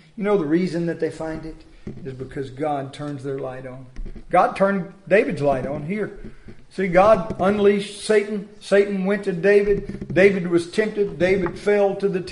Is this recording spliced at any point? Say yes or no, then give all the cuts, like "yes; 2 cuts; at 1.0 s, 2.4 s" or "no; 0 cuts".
no; 0 cuts